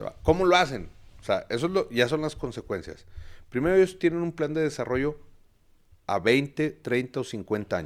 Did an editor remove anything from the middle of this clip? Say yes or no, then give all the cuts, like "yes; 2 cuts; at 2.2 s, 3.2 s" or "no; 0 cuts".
no; 0 cuts